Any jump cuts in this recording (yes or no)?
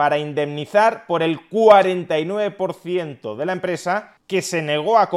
no